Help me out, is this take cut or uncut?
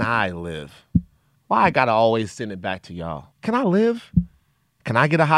cut